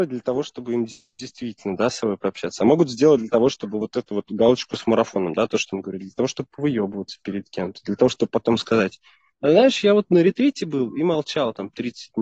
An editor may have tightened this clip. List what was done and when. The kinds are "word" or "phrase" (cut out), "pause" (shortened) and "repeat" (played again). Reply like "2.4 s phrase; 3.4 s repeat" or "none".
none